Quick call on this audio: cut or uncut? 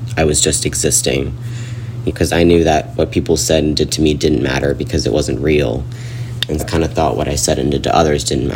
cut